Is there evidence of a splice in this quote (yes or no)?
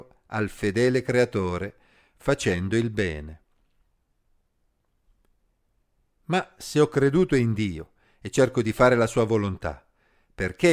no